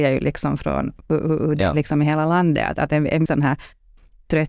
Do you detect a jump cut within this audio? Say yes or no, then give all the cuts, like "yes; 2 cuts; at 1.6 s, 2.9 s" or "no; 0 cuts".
yes; 1 cut; at 3.3 s